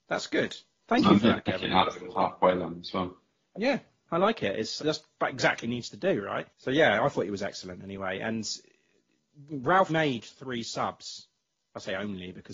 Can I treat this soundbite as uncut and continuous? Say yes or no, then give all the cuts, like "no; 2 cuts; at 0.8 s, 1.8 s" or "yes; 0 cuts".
no; 4 cuts; at 4.1 s, 4.8 s, 5.6 s, 9.9 s